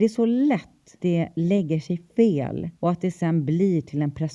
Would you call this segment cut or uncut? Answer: cut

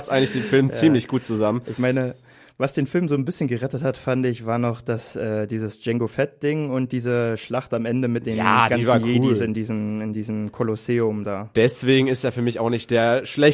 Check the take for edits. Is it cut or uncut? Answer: uncut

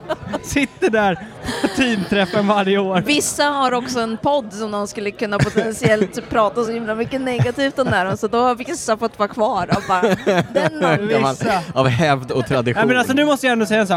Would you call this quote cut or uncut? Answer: uncut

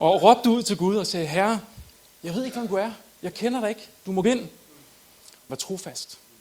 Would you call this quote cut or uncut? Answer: cut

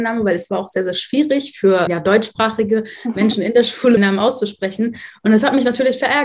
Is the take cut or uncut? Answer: cut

